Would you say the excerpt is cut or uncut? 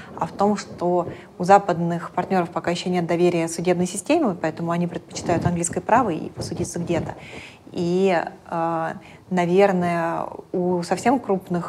uncut